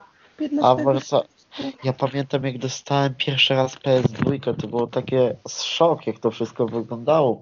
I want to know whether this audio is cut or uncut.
uncut